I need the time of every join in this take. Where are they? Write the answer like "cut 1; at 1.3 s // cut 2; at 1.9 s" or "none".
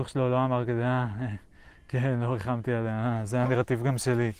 none